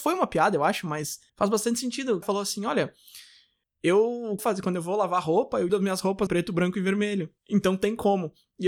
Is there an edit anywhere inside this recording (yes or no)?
yes